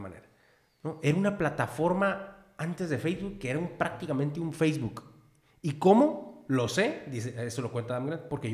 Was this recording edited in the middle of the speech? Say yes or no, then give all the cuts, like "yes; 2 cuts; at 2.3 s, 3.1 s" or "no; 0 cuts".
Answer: no; 0 cuts